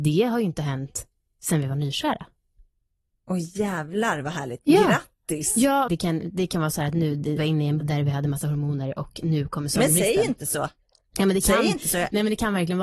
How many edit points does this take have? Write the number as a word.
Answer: three